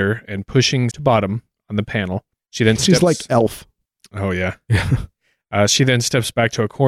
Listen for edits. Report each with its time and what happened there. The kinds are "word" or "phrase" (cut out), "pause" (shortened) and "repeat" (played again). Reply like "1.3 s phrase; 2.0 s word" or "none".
0.9 s phrase